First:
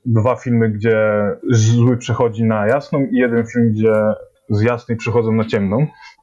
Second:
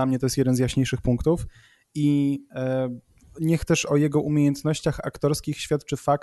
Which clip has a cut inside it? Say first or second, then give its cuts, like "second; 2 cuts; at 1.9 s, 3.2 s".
first; 2 cuts; at 1.4 s, 4.4 s